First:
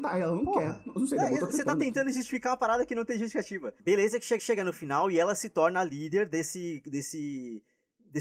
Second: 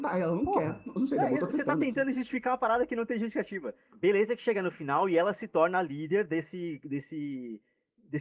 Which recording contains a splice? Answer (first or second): first